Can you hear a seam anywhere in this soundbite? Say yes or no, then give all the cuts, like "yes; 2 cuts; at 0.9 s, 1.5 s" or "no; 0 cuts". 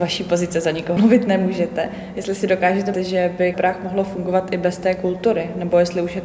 yes; 3 cuts; at 1.0 s, 2.9 s, 3.5 s